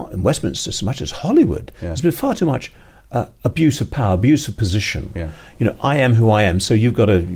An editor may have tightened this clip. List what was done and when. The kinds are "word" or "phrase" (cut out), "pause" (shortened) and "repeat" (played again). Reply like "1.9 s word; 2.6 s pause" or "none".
none